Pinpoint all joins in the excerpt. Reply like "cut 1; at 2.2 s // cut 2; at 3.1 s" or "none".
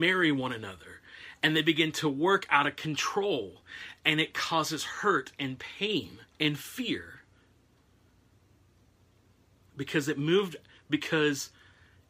cut 1; at 6.3 s